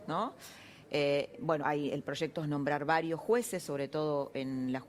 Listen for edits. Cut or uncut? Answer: cut